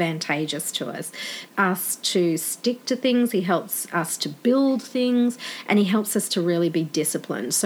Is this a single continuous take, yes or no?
no